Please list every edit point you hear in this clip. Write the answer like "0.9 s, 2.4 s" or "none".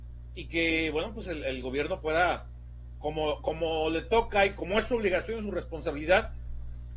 none